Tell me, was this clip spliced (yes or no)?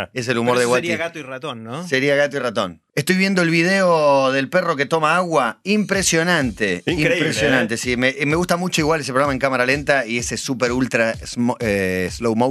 yes